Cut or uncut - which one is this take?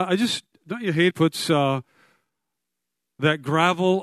cut